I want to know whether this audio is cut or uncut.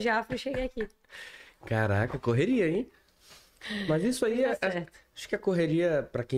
uncut